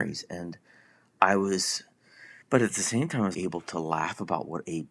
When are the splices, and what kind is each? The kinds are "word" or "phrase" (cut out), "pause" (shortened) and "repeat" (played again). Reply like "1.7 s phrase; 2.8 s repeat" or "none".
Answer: 2.4 s pause; 3.3 s word